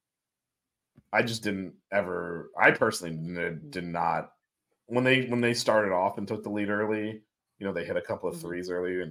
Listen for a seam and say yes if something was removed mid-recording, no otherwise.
no